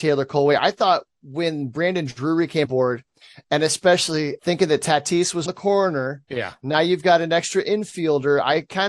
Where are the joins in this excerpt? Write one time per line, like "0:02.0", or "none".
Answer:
0:02.6
0:04.4
0:05.5